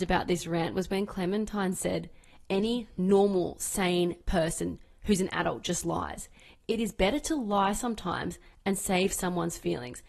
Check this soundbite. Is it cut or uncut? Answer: uncut